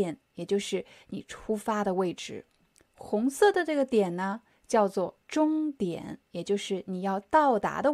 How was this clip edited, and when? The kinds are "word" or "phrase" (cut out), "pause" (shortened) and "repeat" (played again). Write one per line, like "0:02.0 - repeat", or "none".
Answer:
0:05.2 - pause